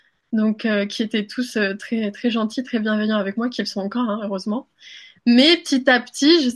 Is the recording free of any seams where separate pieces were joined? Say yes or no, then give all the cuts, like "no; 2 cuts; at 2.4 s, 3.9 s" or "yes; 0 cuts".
yes; 0 cuts